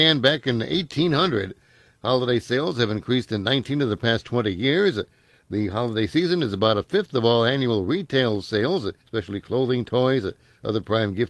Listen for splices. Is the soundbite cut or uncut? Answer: cut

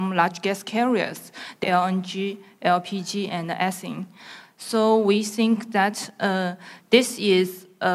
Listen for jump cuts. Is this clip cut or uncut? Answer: cut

